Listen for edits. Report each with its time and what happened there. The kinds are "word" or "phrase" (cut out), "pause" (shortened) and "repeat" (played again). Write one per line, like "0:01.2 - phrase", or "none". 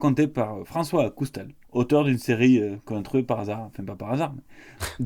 0:01.6 - pause